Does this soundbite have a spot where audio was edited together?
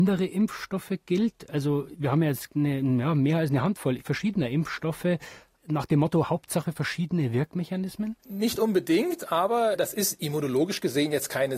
yes; 1 cut; at 8.2 s

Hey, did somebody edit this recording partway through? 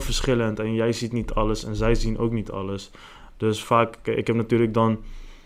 no; 0 cuts

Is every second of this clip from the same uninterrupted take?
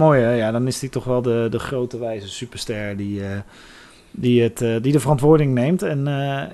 yes; 0 cuts

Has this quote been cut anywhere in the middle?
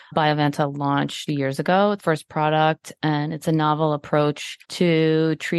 yes; 3 cuts; at 1.3 s, 2.0 s, 4.6 s

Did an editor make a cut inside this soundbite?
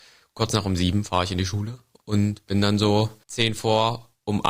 no; 0 cuts

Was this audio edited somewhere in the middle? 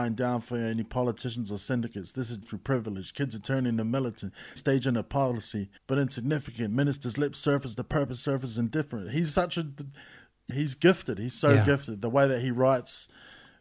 yes; 4 cuts; at 2.4 s, 4.6 s, 5.8 s, 10.5 s

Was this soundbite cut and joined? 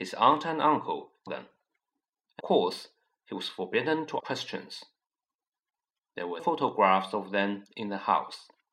yes; 4 cuts; at 1.3 s, 2.4 s, 4.2 s, 6.4 s

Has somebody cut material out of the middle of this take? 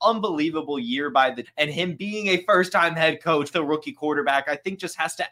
yes; 2 cuts; at 1.4 s, 3.5 s

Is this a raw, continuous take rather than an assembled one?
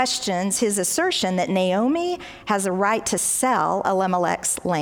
yes; 0 cuts

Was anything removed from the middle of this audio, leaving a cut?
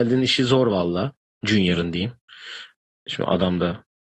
no; 0 cuts

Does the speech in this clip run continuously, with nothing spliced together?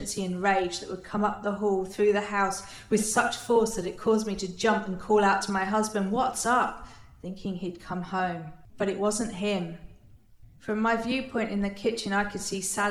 yes; 0 cuts

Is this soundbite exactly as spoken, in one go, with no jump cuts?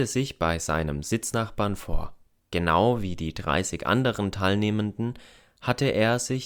yes; 0 cuts

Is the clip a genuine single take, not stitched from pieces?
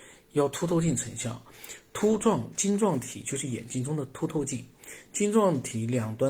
yes; 0 cuts

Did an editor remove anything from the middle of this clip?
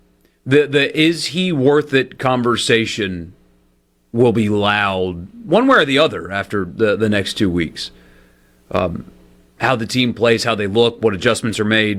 no; 0 cuts

